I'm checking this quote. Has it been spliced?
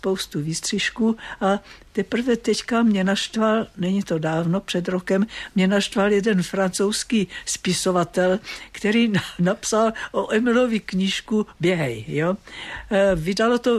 no; 0 cuts

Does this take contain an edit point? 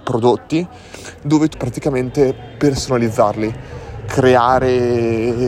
yes; 1 cut; at 1.5 s

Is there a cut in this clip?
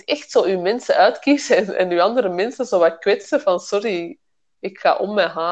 no; 0 cuts

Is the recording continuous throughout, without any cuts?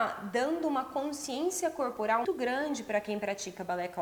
no; 1 cut; at 2.2 s

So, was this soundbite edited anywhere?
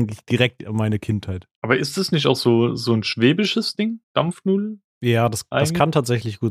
yes; 2 cuts; at 1.6 s, 4.0 s

